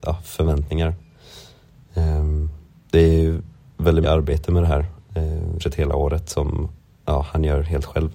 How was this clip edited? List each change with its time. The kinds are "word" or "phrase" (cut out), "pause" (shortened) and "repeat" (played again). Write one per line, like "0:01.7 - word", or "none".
0:04.0 - word
0:05.6 - word